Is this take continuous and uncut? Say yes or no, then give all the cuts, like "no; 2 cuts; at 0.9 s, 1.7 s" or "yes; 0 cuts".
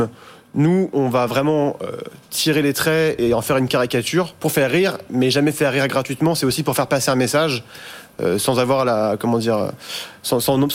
yes; 0 cuts